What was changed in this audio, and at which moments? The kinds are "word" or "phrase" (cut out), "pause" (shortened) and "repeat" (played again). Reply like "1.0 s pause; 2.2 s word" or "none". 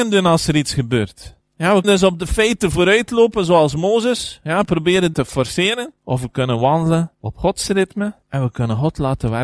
1.4 s pause; 1.8 s word; 5.1 s word; 6.0 s pause; 7.1 s pause; 8.2 s pause